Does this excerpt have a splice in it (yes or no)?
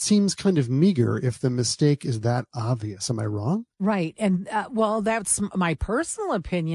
no